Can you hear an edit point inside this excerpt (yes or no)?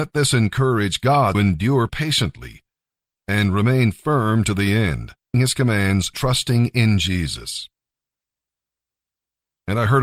yes